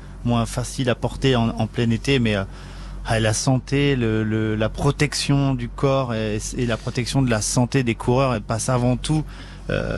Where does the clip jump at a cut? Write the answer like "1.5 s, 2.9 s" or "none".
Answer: none